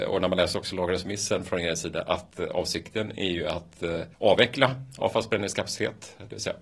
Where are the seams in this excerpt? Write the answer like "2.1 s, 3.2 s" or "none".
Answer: 4.1 s